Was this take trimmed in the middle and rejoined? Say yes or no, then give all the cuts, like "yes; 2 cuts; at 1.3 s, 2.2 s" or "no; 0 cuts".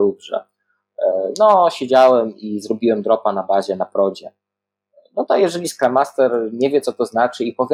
no; 0 cuts